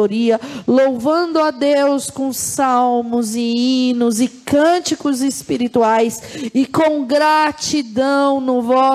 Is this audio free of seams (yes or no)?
yes